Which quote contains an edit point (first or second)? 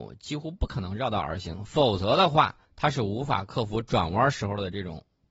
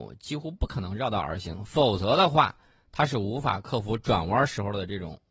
first